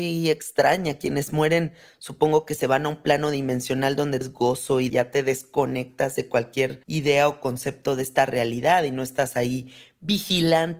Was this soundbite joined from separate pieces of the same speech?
yes; 3 cuts; at 4.2 s, 4.9 s, 6.8 s

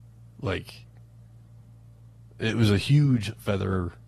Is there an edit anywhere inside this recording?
no; 0 cuts

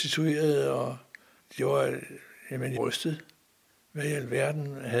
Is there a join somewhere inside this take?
yes; 2 cuts; at 1.4 s, 2.8 s

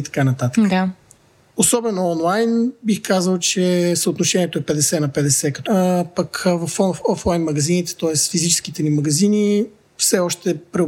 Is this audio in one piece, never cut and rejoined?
no; 1 cut; at 5.7 s

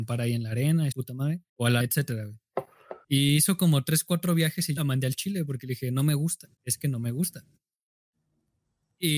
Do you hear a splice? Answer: yes; 6 cuts; at 0.9 s, 1.5 s, 1.8 s, 3.0 s, 4.8 s, 6.6 s

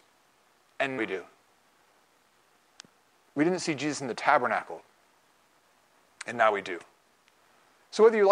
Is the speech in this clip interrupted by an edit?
yes; 1 cut; at 1.0 s

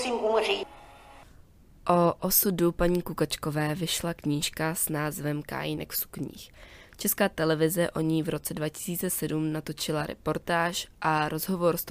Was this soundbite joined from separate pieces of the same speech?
no; 0 cuts

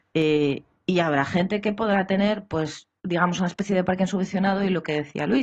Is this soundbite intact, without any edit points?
yes; 0 cuts

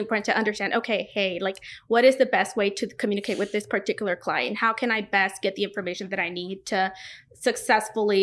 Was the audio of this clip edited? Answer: no; 0 cuts

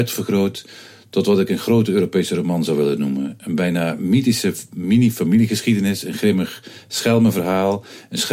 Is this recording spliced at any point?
no; 0 cuts

